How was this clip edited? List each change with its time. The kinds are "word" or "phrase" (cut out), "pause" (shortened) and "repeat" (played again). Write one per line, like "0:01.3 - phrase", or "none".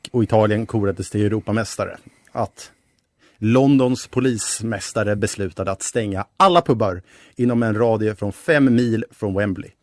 none